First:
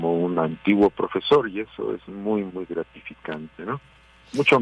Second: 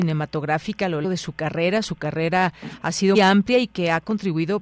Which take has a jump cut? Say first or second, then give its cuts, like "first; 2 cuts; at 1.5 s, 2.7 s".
second; 2 cuts; at 1.0 s, 3.1 s